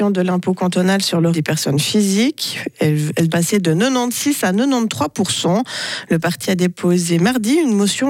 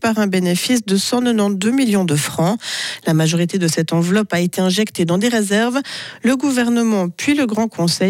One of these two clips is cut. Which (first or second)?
first